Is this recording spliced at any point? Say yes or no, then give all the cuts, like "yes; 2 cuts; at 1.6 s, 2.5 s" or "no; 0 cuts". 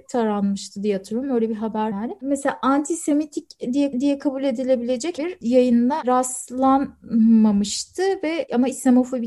yes; 3 cuts; at 1.9 s, 3.9 s, 5.2 s